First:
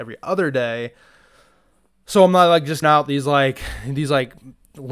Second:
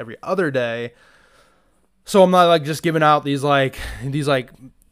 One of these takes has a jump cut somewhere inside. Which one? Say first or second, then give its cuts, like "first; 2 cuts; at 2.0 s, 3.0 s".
first; 1 cut; at 2.8 s